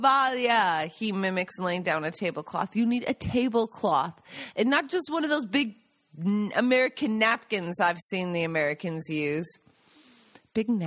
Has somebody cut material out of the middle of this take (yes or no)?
no